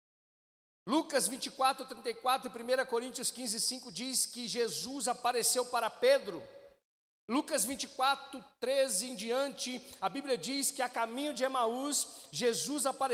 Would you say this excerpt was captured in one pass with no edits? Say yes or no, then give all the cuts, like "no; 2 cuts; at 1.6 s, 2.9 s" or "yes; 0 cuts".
yes; 0 cuts